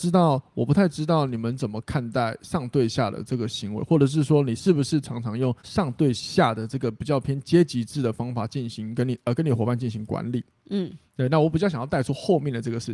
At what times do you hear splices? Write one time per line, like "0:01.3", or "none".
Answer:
0:05.6

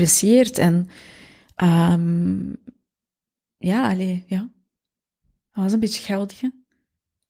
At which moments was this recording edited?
0:06.3

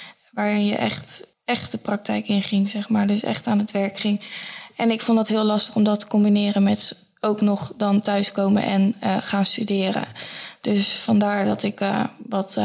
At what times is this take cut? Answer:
0:01.3

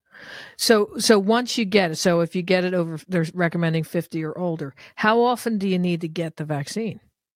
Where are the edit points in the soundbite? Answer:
none

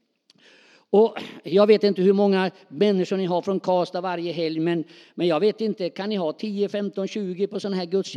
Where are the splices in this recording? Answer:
none

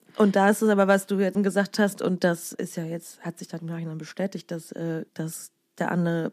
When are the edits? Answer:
0:01.3
0:02.5
0:03.6
0:05.1

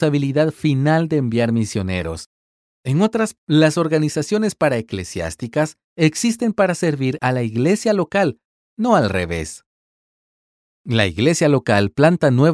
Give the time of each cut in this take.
0:03.4

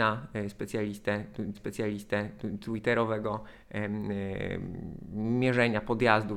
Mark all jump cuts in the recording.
0:01.5

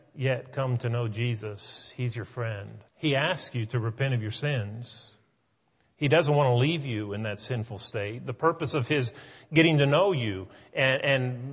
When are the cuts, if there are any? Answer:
0:02.9

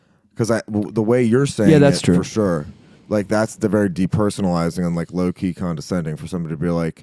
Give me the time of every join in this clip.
none

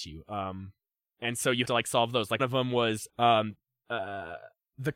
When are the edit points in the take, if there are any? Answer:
0:01.6
0:02.4
0:03.1

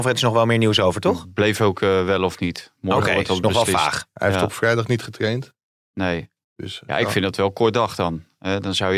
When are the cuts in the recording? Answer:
none

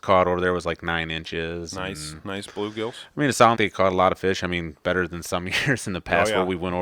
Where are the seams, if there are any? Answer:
0:03.5

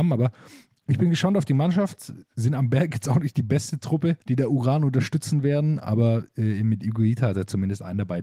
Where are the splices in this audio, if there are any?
0:04.2

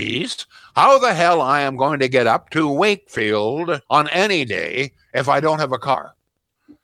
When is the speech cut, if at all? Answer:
0:03.9

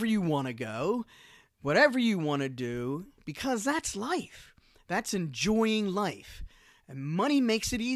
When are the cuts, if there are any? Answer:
none

